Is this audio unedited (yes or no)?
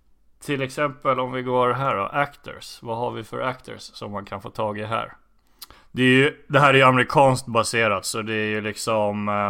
no